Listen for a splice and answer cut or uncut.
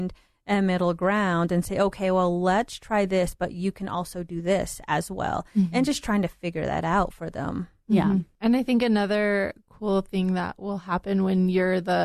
uncut